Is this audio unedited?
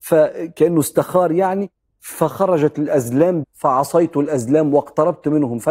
no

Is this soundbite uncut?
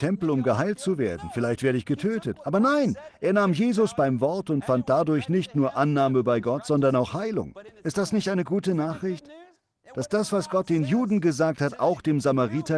no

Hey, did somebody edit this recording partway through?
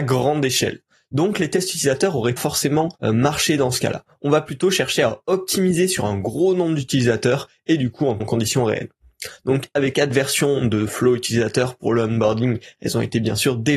yes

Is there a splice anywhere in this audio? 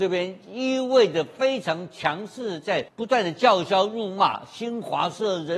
yes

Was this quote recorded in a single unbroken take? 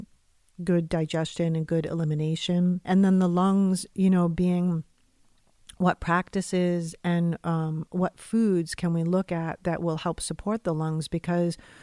no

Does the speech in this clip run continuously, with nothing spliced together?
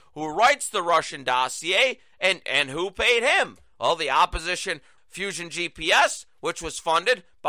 no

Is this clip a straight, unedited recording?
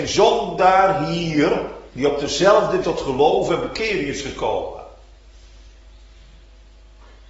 no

